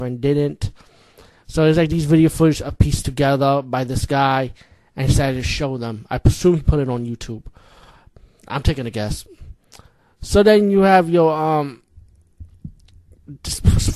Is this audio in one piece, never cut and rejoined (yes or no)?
yes